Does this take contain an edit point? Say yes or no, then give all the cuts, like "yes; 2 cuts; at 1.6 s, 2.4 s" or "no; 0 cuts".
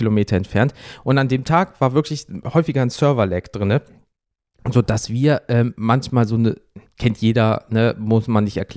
no; 0 cuts